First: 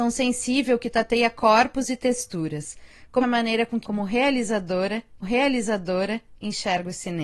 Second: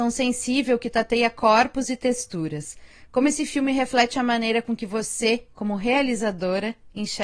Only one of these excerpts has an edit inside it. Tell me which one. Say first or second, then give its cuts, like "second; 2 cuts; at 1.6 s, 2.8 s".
first; 3 cuts; at 3.2 s, 3.8 s, 5.2 s